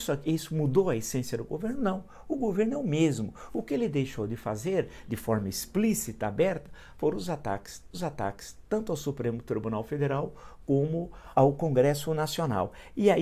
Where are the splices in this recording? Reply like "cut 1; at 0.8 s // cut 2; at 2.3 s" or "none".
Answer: cut 1; at 7.9 s // cut 2; at 11.3 s